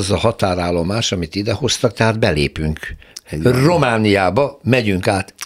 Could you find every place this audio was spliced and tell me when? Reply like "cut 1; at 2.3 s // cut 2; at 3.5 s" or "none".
none